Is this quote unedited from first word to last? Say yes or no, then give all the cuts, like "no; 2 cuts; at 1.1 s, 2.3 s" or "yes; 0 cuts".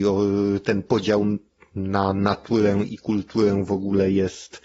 yes; 0 cuts